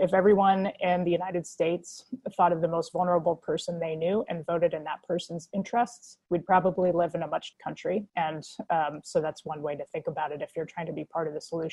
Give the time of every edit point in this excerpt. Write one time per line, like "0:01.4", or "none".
0:06.2
0:07.5
0:08.1